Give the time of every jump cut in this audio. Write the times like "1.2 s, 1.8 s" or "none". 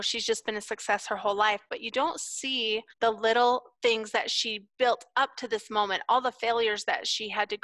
2.9 s

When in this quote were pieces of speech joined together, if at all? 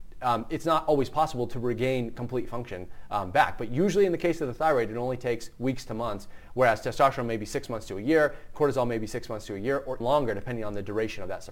10.0 s

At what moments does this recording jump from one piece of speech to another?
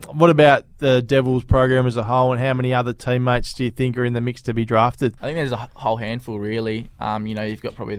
5.2 s

